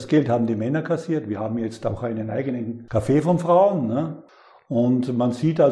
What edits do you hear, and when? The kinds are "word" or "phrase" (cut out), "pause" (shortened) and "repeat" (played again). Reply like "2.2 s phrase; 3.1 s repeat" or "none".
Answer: none